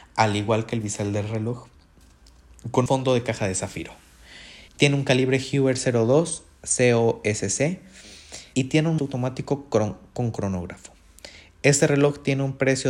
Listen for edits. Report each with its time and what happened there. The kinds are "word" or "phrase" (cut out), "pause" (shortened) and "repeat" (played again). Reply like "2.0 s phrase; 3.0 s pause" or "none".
2.9 s word; 4.7 s pause; 8.5 s word; 9.0 s word